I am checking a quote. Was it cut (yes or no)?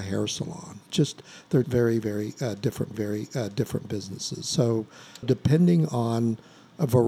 yes